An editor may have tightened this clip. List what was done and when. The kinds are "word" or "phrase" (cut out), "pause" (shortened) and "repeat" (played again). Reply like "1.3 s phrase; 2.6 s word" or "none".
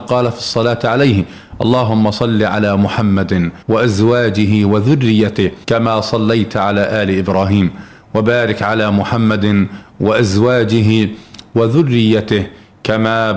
3.6 s pause; 5.6 s pause